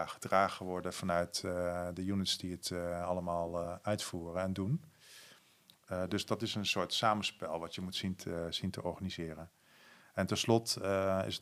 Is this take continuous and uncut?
yes; 0 cuts

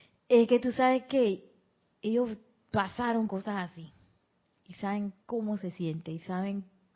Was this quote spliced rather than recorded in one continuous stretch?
yes; 2 cuts; at 3.3 s, 5.2 s

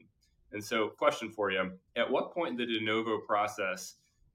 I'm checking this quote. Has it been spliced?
yes; 2 cuts; at 1.0 s, 1.9 s

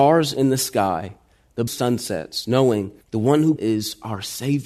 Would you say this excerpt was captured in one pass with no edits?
no; 3 cuts; at 1.7 s, 3.0 s, 3.6 s

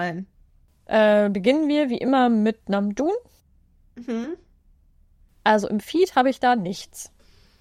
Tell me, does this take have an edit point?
no; 0 cuts

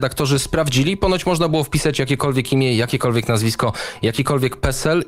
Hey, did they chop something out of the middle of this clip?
no; 0 cuts

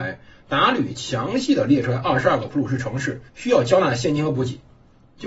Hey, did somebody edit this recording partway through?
yes; 1 cut; at 3.3 s

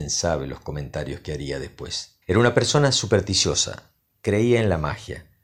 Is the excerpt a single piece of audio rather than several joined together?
no; 1 cut; at 2.2 s

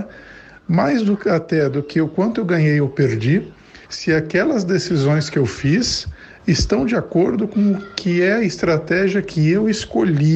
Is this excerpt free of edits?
no; 1 cut; at 3.8 s

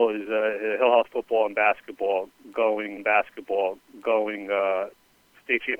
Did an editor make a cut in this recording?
yes; 1 cut; at 3.0 s

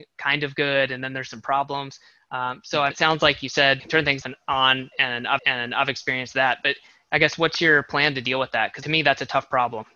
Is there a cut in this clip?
yes; 5 cuts; at 2.9 s, 3.8 s, 4.2 s, 5.4 s, 8.8 s

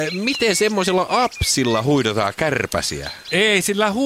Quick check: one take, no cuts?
yes; 0 cuts

